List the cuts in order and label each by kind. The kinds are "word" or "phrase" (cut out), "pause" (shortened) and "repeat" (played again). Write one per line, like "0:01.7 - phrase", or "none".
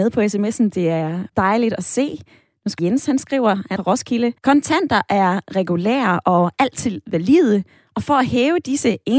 0:01.3 - pause
0:02.8 - phrase
0:03.8 - phrase
0:04.4 - pause